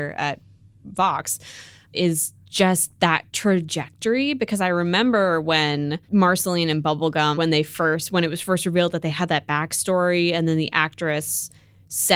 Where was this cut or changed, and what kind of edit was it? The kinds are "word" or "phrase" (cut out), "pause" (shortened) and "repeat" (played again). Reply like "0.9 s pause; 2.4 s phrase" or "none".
1.9 s word; 3.3 s pause; 6.0 s pause; 7.3 s word